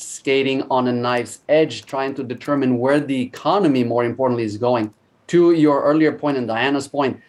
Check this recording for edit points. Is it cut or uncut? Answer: uncut